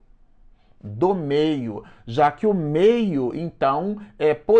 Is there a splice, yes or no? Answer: no